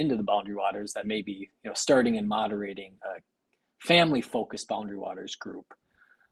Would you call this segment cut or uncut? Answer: uncut